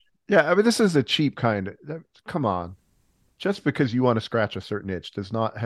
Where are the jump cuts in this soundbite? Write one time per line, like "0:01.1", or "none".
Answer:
none